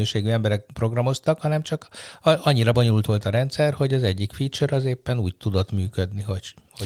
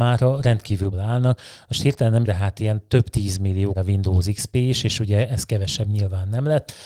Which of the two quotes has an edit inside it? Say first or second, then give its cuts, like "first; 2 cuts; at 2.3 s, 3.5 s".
second; 3 cuts; at 0.9 s, 2.2 s, 3.7 s